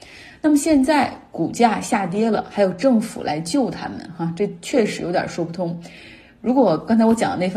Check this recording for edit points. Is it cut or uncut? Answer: uncut